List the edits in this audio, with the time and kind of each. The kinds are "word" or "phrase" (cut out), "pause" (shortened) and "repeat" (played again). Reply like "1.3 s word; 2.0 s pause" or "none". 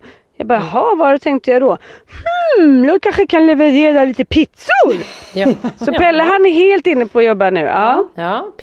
3.0 s phrase